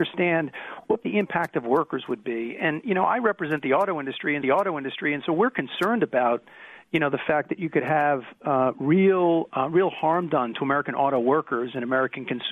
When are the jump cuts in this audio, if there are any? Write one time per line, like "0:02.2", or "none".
0:04.4